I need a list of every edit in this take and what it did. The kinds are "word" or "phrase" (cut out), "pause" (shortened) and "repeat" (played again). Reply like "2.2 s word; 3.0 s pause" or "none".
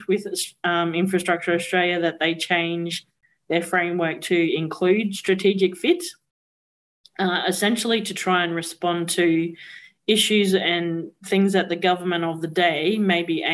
none

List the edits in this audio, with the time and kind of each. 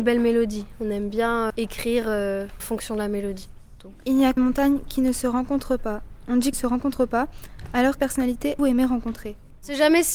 1.5 s word; 2.6 s word; 4.4 s word; 6.5 s phrase; 8.0 s word; 8.6 s word

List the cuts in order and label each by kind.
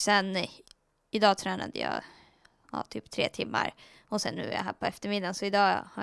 none

